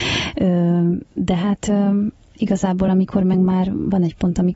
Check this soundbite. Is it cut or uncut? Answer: uncut